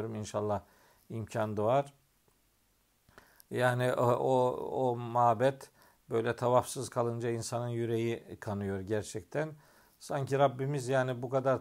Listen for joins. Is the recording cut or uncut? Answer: uncut